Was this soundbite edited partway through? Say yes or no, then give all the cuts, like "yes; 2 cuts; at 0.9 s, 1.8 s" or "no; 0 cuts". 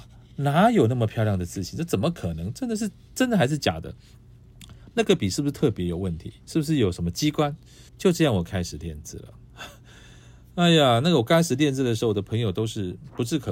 yes; 2 cuts; at 6.4 s, 7.9 s